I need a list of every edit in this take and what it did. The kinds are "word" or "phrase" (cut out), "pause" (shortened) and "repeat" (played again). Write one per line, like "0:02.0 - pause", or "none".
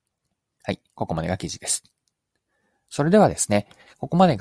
none